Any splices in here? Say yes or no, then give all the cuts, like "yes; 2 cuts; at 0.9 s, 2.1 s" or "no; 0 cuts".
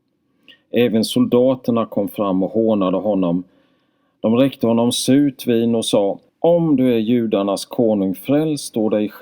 yes; 1 cut; at 6.3 s